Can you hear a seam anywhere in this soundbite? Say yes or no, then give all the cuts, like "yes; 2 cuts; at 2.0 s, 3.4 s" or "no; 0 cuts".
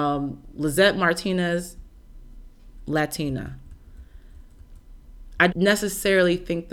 yes; 1 cut; at 5.5 s